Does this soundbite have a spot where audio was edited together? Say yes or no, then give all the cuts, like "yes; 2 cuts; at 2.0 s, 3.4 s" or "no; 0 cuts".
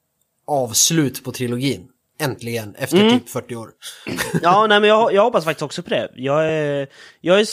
no; 0 cuts